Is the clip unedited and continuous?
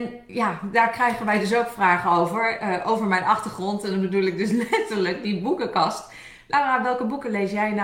yes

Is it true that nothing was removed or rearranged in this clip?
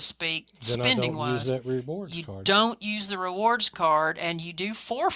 yes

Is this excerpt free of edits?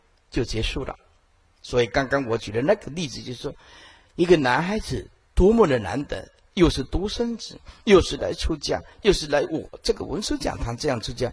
yes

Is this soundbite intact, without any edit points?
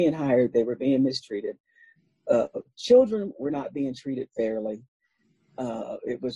yes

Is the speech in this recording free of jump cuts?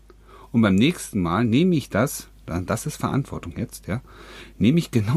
yes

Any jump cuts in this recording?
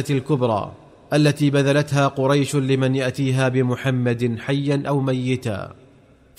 no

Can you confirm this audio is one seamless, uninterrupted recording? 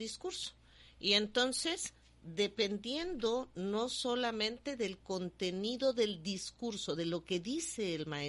yes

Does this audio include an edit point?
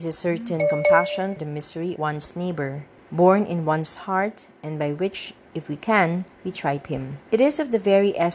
yes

